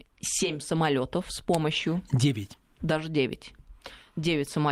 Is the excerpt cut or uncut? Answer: uncut